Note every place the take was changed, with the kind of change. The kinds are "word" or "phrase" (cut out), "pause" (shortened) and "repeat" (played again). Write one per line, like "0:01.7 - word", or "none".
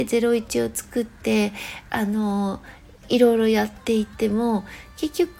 none